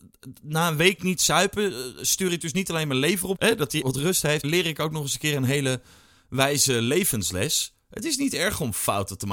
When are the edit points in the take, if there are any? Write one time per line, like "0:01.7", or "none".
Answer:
0:03.4
0:03.8
0:04.4